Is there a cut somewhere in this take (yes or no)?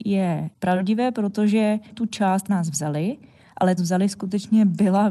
yes